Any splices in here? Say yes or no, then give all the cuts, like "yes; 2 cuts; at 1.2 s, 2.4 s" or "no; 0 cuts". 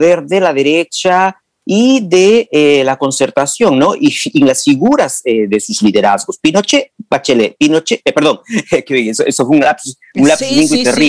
no; 0 cuts